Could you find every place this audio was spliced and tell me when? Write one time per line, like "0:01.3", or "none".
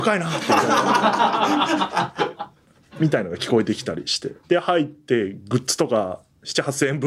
0:04.4